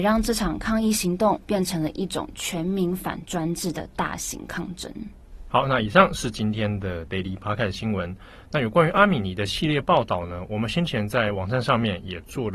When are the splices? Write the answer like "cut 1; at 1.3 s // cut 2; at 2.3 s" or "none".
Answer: none